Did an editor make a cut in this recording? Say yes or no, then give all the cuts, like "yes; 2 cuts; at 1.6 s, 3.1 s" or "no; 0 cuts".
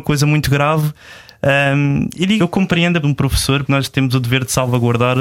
yes; 3 cuts; at 2.4 s, 3.0 s, 3.7 s